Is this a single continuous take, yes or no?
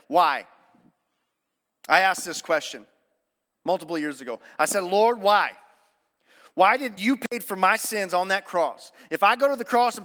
no